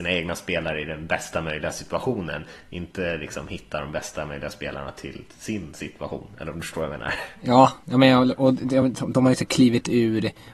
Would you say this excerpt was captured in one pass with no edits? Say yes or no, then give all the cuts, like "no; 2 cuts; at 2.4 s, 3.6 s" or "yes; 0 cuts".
yes; 0 cuts